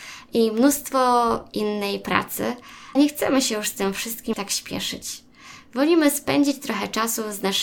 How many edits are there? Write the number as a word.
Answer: two